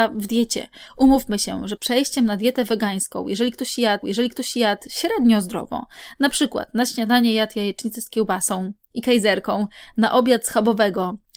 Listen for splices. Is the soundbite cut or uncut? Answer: cut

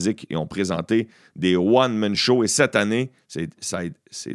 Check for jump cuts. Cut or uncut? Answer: uncut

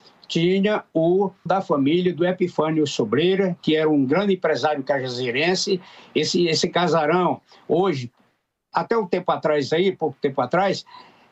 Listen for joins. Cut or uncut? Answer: cut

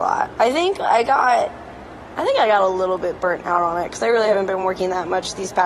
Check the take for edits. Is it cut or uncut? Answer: uncut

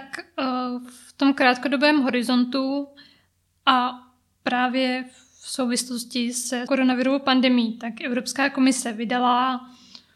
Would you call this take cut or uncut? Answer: cut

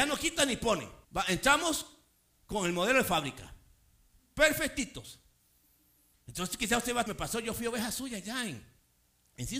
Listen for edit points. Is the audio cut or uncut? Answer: cut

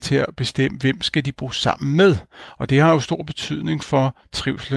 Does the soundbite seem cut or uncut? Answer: uncut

